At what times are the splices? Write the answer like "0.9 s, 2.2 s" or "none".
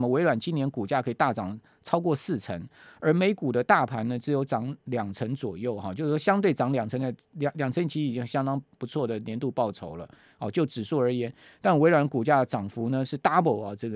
none